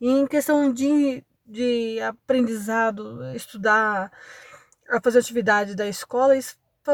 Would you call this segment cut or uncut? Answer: uncut